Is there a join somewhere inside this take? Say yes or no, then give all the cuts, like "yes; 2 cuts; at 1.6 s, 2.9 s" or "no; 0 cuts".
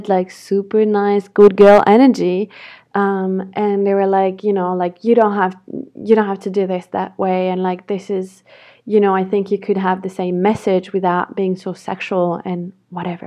no; 0 cuts